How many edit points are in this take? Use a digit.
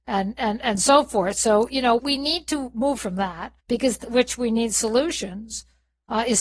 4